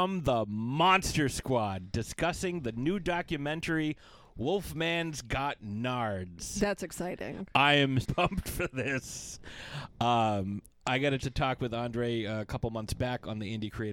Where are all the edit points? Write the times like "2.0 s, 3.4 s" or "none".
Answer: 8.0 s, 11.2 s